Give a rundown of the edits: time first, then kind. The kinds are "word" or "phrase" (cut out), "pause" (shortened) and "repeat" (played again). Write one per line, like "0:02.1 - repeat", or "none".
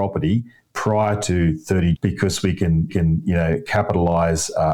0:01.9 - word
0:02.9 - repeat